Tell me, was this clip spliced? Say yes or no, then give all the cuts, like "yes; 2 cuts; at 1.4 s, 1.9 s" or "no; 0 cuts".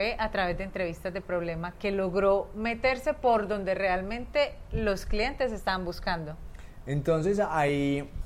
yes; 1 cut; at 1.7 s